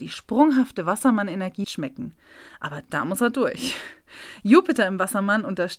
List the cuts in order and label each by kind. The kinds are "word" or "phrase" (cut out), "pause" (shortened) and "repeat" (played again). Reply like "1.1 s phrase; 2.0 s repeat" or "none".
1.6 s word